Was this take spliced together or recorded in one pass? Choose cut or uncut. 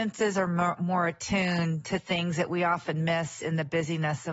uncut